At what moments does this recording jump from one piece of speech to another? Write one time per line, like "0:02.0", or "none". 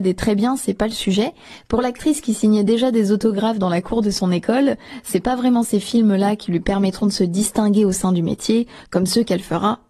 none